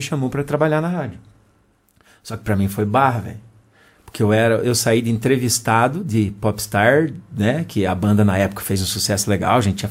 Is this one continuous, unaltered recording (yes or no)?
yes